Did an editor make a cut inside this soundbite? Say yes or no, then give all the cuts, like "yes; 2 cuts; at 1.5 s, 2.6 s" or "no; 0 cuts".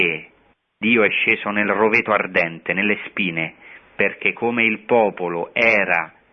no; 0 cuts